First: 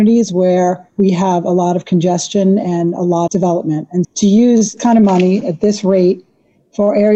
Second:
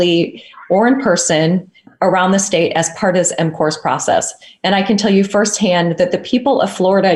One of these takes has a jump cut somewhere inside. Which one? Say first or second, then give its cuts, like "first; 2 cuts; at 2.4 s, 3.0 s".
first; 3 cuts; at 3.3 s, 4.0 s, 4.8 s